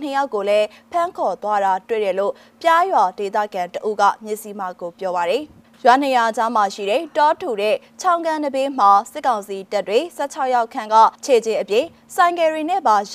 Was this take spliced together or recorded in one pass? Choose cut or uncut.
cut